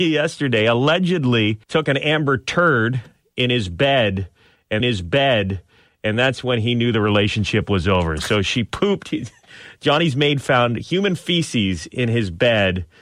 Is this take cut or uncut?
cut